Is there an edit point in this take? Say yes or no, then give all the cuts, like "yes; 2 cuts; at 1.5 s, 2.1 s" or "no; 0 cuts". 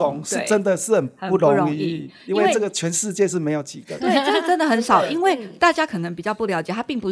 no; 0 cuts